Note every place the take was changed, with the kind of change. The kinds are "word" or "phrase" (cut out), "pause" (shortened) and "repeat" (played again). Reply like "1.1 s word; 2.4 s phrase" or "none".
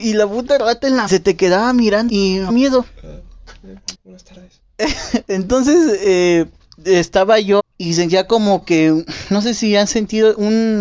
1.1 s phrase; 2.1 s word; 2.5 s phrase; 3.9 s word; 6.6 s pause; 7.6 s phrase